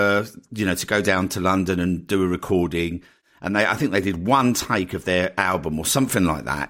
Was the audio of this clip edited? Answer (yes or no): no